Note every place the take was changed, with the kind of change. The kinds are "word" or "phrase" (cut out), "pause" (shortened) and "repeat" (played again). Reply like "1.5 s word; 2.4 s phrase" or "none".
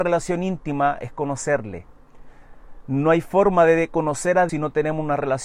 4.5 s word